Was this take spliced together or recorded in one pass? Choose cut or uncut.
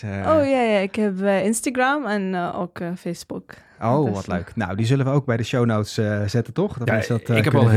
uncut